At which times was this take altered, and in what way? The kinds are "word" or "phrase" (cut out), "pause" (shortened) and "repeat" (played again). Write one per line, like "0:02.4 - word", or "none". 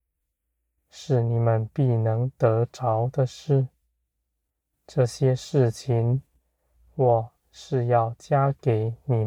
none